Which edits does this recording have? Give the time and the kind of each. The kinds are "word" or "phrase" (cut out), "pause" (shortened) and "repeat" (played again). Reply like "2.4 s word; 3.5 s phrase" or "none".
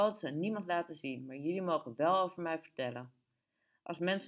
none

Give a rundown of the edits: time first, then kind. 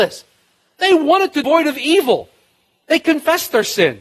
1.4 s word

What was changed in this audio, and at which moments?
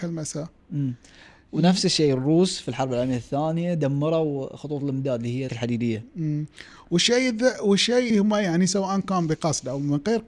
5.5 s word; 8.1 s word

